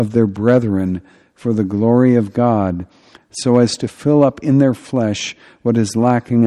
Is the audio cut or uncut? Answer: uncut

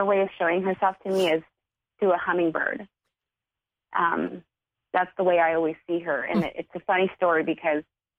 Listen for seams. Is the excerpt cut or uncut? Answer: uncut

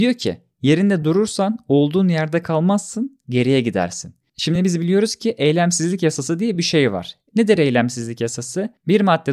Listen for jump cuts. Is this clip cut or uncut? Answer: uncut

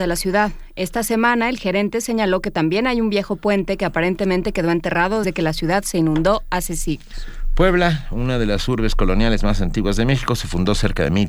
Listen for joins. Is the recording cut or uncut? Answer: cut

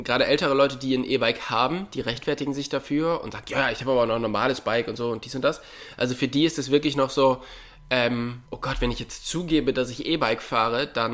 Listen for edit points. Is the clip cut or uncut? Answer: cut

